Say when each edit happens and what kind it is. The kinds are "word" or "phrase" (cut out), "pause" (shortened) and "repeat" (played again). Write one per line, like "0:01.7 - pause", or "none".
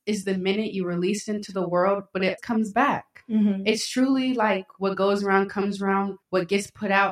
0:02.4 - word
0:06.2 - pause